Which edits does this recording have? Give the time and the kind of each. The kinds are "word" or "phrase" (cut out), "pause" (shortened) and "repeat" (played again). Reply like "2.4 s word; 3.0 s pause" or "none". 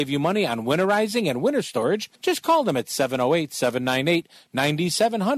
2.2 s pause